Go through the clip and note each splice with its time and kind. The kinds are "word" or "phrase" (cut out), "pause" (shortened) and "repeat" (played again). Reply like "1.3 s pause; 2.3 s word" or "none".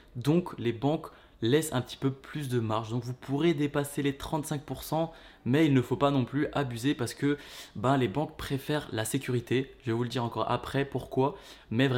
none